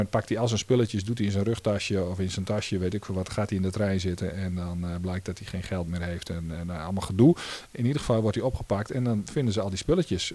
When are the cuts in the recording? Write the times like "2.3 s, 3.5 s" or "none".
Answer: none